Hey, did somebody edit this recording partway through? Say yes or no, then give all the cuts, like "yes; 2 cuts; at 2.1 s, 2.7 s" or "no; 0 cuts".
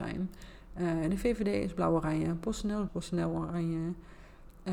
yes; 1 cut; at 2.9 s